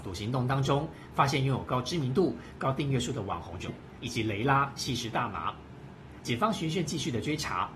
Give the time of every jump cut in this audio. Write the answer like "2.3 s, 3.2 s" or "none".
3.7 s